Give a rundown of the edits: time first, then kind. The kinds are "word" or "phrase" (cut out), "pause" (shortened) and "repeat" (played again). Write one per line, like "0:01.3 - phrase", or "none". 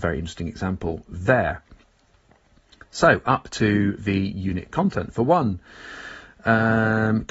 none